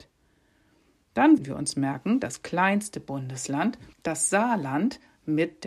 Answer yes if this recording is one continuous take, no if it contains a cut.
no